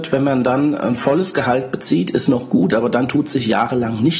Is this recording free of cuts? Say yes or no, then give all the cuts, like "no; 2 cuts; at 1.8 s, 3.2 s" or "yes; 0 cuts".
yes; 0 cuts